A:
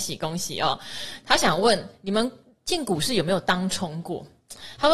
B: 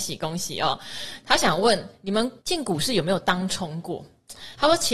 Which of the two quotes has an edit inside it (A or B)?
B